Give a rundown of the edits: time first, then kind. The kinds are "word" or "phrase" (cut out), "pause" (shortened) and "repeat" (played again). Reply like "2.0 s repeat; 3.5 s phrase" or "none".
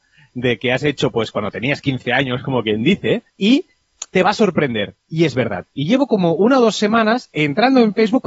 3.3 s pause; 5.0 s pause